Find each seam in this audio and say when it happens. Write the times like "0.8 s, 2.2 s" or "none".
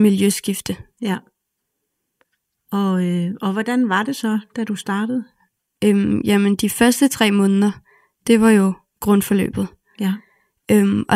none